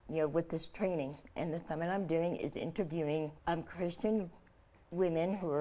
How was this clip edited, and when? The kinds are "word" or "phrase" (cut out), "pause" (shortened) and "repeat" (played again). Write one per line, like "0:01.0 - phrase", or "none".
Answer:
0:03.4 - pause